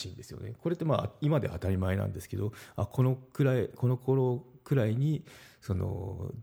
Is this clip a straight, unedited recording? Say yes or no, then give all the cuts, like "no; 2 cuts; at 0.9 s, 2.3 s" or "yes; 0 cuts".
yes; 0 cuts